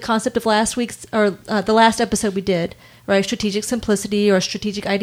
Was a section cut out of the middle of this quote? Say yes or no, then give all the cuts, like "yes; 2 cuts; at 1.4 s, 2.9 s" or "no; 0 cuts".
no; 0 cuts